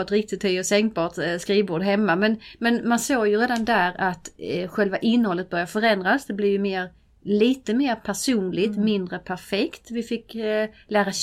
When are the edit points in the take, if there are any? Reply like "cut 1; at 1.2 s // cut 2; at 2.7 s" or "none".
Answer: none